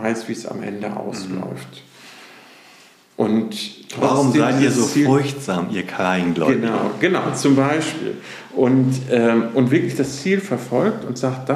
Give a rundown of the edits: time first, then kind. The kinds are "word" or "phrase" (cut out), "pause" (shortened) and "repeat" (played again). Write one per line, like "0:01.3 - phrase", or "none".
none

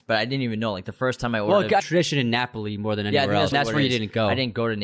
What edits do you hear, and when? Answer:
0:01.8 - phrase
0:03.5 - word

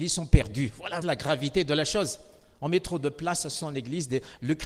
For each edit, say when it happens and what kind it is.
0:01.0 - word

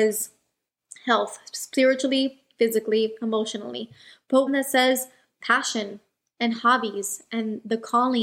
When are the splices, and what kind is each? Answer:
0:04.5 - word

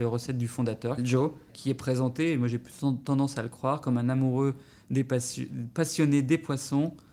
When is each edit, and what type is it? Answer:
0:01.0 - word
0:01.5 - word

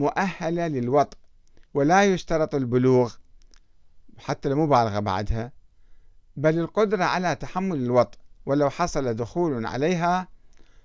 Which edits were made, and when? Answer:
0:01.7 - pause

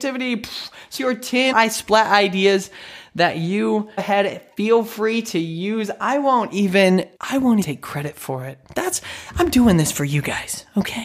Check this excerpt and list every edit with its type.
0:01.0 - word
0:01.5 - word
0:04.0 - phrase
0:07.2 - pause
0:07.6 - word

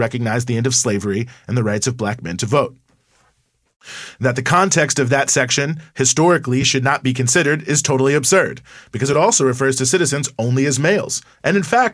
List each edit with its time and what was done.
none

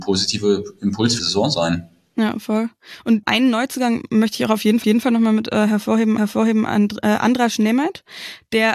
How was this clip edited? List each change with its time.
0:01.2 - phrase
0:03.2 - word
0:04.8 - repeat
0:06.2 - repeat

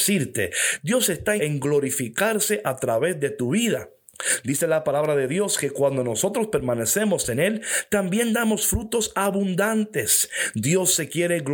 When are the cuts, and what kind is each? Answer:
0:01.4 - word

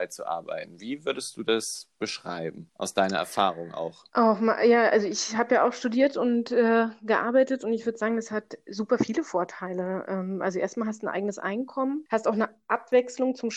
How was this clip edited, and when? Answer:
0:04.1 - pause

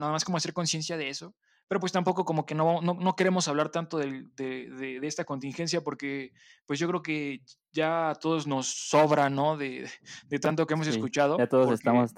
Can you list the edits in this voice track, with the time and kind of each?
none

